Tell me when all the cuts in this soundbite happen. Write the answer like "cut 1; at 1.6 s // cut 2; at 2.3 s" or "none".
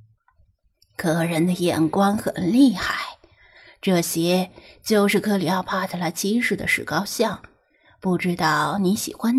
none